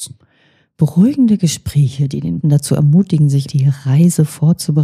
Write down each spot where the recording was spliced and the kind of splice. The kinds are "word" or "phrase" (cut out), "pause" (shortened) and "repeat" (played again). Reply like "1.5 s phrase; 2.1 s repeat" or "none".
2.4 s word; 3.5 s word